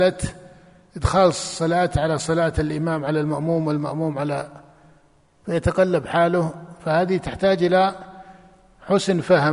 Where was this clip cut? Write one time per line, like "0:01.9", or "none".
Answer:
none